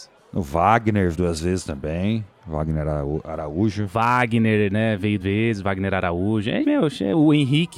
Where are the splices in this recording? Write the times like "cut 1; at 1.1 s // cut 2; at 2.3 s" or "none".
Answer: cut 1; at 1.1 s // cut 2; at 5.2 s // cut 3; at 6.6 s